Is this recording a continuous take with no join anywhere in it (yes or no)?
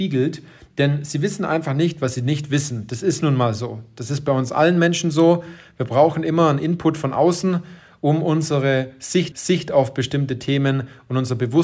no